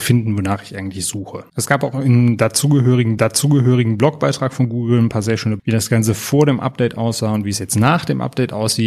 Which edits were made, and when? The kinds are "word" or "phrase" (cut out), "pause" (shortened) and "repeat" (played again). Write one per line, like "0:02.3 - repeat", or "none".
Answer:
0:01.5 - pause
0:03.2 - repeat
0:05.6 - word